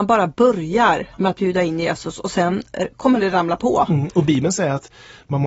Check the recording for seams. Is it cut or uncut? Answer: cut